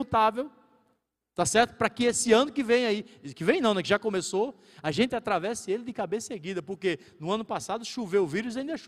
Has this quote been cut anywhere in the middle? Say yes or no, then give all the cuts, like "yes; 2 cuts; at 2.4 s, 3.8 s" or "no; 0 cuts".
no; 0 cuts